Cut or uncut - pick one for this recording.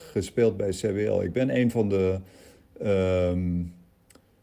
uncut